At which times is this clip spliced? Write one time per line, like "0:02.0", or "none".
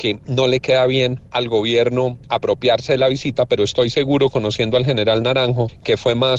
none